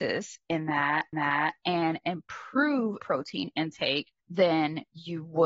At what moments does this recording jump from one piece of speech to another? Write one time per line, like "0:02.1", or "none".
0:01.1
0:03.0
0:04.2